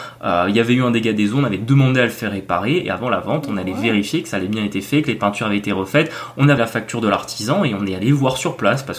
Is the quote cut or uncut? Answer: cut